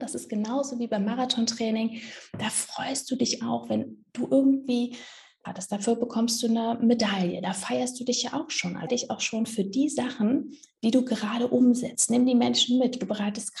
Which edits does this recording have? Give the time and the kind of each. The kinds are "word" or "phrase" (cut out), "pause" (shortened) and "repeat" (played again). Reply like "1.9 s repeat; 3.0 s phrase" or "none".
5.4 s phrase; 8.9 s word